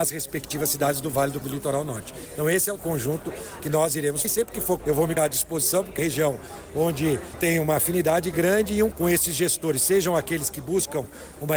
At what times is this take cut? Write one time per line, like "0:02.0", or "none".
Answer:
0:01.4
0:02.8
0:04.2
0:04.8
0:05.2
0:06.0
0:07.3
0:08.9